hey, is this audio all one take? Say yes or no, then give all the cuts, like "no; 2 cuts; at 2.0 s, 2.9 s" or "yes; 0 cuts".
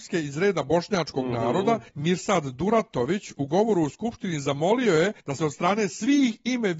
no; 2 cuts; at 1.9 s, 5.2 s